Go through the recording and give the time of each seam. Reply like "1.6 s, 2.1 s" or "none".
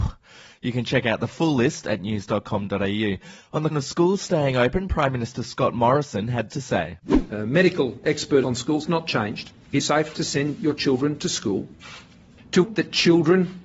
3.7 s, 6.5 s, 8.4 s, 8.9 s, 9.8 s, 12.6 s